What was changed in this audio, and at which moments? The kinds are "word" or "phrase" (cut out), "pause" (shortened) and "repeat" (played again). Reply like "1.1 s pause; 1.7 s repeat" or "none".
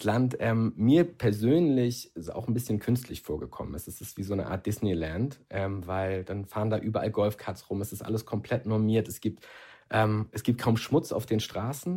none